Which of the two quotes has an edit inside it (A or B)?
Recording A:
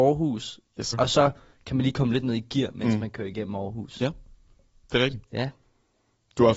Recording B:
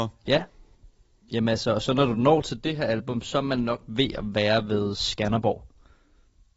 A